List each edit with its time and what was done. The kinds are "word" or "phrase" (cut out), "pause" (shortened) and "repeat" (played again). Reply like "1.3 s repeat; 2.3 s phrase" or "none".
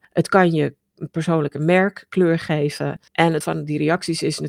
3.1 s pause; 3.4 s word

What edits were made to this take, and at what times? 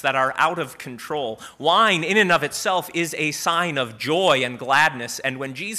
none

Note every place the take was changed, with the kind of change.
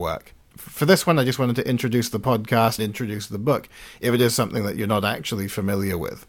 2.8 s word

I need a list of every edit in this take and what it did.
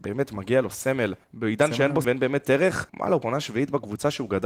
1.2 s pause; 2.0 s word; 2.9 s pause; 3.2 s word

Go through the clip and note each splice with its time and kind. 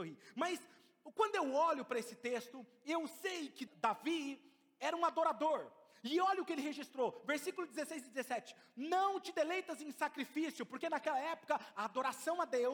3.7 s word

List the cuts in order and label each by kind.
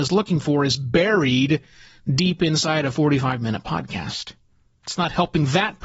none

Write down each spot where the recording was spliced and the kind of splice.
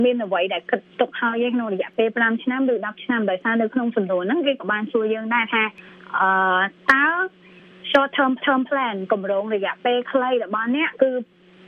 8.4 s repeat

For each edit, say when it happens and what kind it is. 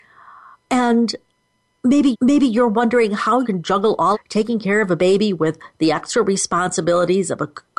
2.1 s repeat; 3.4 s word; 4.1 s phrase

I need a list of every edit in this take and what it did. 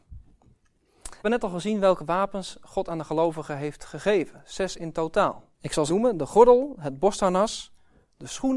1.2 s word; 5.5 s pause; 5.9 s phrase

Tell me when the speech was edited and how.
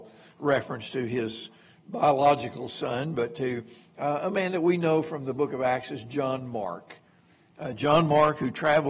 none

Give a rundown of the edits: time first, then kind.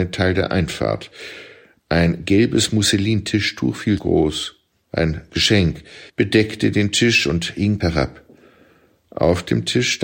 4.0 s word; 6.1 s pause; 7.8 s phrase

